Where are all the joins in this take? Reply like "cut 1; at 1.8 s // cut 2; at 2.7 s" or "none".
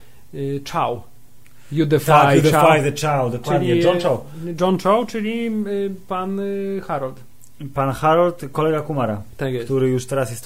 none